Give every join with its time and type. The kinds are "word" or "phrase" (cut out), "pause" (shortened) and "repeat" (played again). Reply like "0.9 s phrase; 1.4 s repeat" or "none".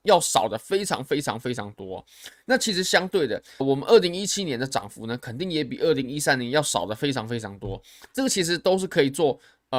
3.6 s word